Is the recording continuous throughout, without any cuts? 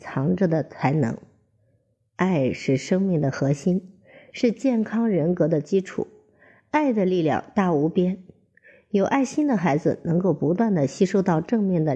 yes; 0 cuts

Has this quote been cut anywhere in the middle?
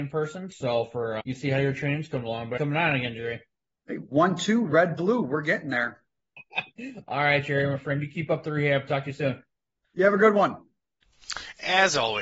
yes; 2 cuts; at 1.2 s, 2.6 s

